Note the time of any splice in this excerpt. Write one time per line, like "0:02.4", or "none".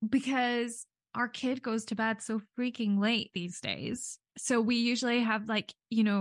none